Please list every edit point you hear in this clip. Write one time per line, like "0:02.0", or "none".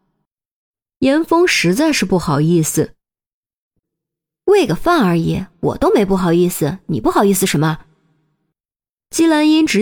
none